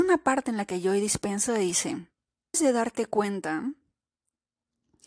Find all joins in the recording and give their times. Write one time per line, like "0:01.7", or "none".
0:02.5